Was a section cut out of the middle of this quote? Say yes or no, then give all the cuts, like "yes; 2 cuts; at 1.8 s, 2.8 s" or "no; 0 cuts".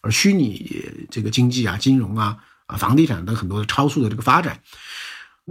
no; 0 cuts